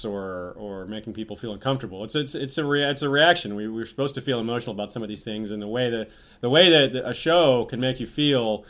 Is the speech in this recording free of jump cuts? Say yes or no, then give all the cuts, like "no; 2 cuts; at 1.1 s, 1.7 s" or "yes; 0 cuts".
yes; 0 cuts